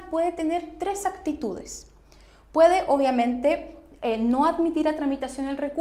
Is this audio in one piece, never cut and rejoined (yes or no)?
yes